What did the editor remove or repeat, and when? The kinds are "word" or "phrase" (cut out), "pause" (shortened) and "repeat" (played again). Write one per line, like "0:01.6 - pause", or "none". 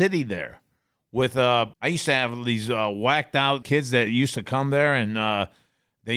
0:01.7 - pause
0:03.6 - word